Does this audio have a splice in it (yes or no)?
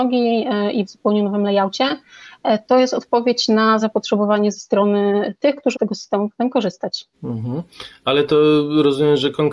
yes